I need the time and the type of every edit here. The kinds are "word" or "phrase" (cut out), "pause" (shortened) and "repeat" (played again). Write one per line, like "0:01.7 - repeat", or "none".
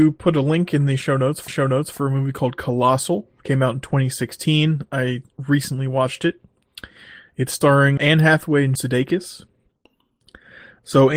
0:01.5 - repeat
0:08.0 - word
0:08.7 - word

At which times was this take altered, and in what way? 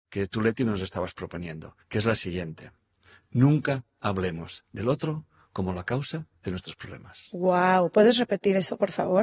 0:01.8 - pause

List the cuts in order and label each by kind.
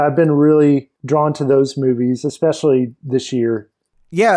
0:01.0 - pause

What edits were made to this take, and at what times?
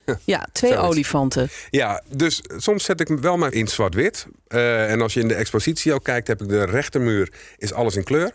0:02.1 - word
0:03.5 - word

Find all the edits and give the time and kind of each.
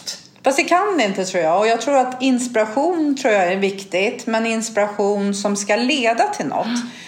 none

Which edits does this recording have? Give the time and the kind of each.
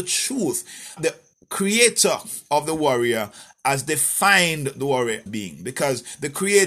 0:01.0 - word
0:05.3 - word

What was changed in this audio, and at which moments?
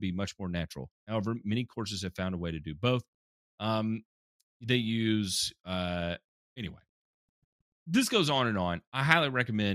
0:01.0 - pause

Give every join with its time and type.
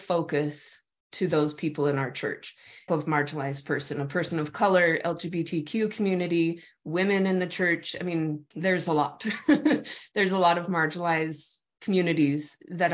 0:02.9 - phrase
0:08.5 - pause

